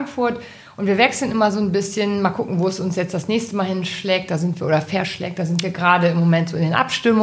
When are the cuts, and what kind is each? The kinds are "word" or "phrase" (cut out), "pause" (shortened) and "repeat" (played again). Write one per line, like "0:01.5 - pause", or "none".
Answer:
none